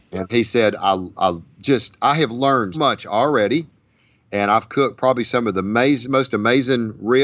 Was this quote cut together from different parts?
yes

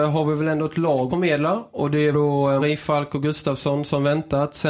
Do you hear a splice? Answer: yes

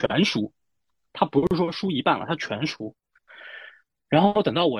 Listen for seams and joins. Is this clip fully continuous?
yes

